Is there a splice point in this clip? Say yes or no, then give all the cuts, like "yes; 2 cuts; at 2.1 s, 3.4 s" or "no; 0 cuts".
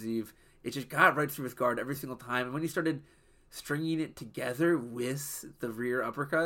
no; 0 cuts